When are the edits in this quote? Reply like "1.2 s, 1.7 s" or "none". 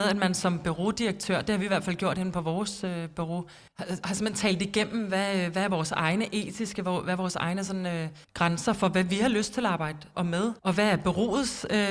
3.7 s, 8.2 s, 10.1 s, 10.6 s